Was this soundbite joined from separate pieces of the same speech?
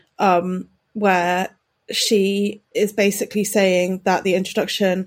no; 0 cuts

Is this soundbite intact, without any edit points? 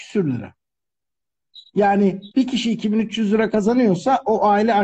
no; 1 cut; at 2.3 s

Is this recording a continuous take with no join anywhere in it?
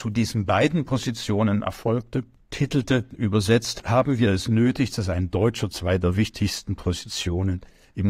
yes; 0 cuts

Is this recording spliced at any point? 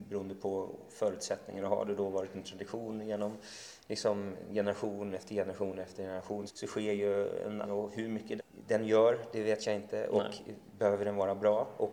yes; 3 cuts; at 6.5 s, 7.6 s, 8.4 s

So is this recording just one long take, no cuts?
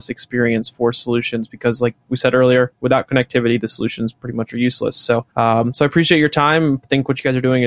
no; 1 cut; at 5.3 s

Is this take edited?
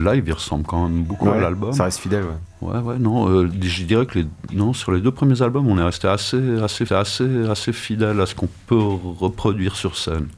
yes; 1 cut; at 6.9 s

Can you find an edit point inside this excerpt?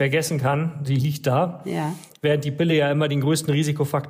no; 0 cuts

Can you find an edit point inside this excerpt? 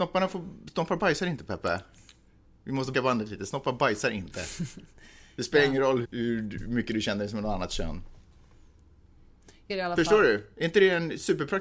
yes; 3 cuts; at 2.9 s, 6.0 s, 9.7 s

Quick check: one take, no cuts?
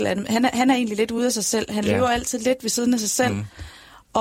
yes; 0 cuts

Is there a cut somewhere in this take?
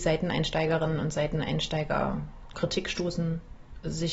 yes; 1 cut; at 2.5 s

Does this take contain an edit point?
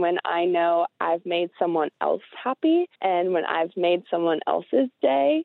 yes; 1 cut; at 2.9 s

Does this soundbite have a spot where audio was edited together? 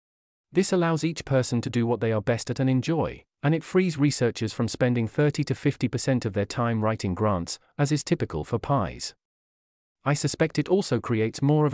no; 0 cuts

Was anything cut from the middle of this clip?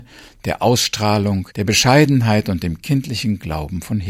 yes; 1 cut; at 1.5 s

